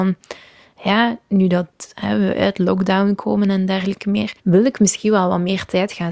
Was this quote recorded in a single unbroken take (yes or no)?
no